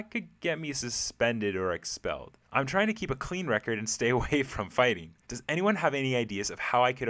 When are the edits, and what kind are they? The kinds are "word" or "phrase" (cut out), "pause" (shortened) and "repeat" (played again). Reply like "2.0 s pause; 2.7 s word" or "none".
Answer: 2.4 s pause; 5.2 s pause